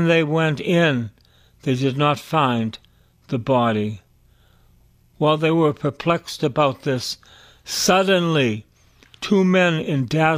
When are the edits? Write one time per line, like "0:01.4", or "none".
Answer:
none